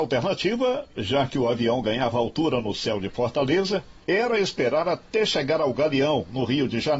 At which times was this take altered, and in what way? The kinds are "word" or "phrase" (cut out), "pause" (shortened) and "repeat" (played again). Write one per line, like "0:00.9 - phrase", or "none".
0:04.0 - pause